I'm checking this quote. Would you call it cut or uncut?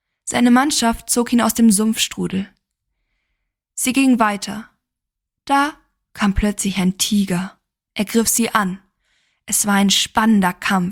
uncut